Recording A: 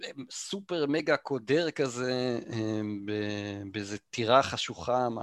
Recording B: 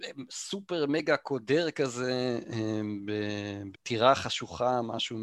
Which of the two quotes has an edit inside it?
B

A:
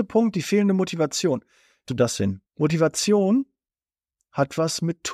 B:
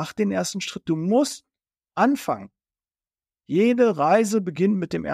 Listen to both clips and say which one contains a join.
A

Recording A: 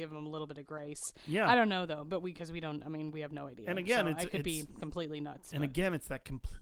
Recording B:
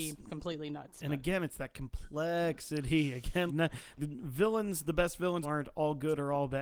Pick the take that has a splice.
B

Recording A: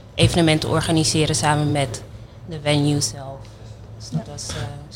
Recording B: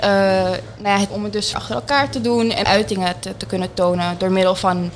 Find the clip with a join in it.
B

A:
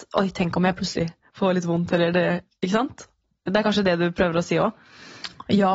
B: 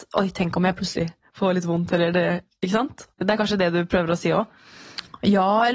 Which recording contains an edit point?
B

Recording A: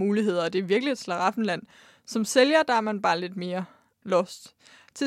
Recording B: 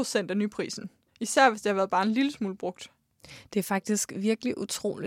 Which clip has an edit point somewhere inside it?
B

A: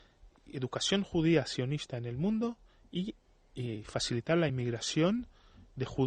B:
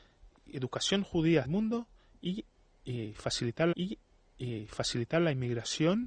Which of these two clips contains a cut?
B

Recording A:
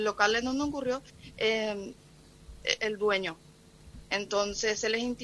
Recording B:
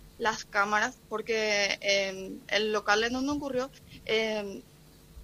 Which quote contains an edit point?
A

